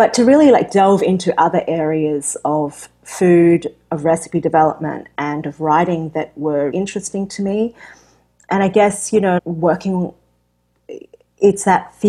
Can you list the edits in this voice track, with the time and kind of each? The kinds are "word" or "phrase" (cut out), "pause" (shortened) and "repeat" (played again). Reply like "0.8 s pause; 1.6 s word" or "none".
6.7 s word; 9.4 s word